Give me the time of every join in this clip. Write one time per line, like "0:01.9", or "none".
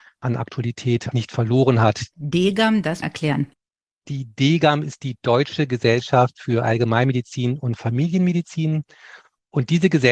0:01.1
0:03.0